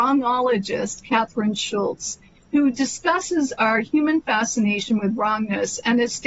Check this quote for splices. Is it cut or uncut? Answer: uncut